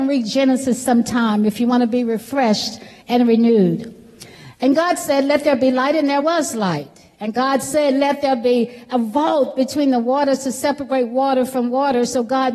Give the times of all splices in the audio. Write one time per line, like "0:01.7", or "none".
none